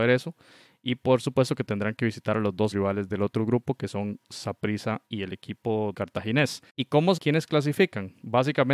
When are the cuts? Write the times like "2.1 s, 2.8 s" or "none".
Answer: 2.7 s, 5.1 s, 5.9 s, 6.7 s, 7.2 s